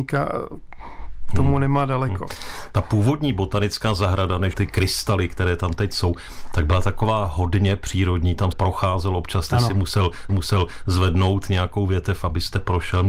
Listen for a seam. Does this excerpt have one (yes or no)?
yes